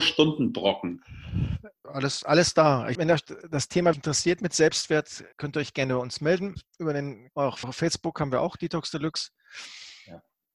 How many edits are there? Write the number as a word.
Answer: seven